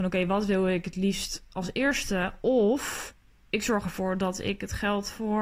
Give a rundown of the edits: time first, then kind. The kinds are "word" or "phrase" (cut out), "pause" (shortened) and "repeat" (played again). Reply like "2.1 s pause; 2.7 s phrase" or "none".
none